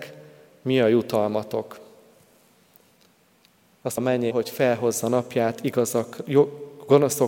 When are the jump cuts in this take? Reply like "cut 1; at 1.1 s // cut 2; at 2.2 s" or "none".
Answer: cut 1; at 4.0 s // cut 2; at 4.3 s